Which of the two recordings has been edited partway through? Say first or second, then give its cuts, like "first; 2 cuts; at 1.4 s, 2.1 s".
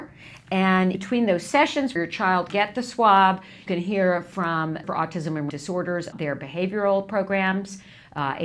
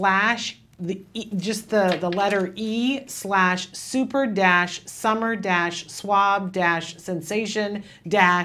first; 7 cuts; at 0.9 s, 2.0 s, 2.5 s, 3.7 s, 4.8 s, 5.5 s, 6.1 s